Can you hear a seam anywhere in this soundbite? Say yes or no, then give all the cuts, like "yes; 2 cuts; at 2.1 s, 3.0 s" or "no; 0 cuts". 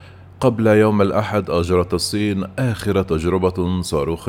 no; 0 cuts